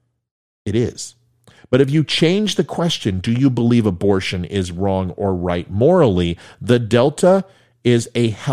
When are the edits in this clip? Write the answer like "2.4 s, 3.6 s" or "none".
none